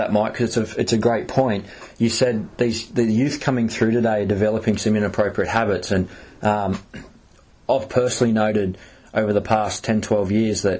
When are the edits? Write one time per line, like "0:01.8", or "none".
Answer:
none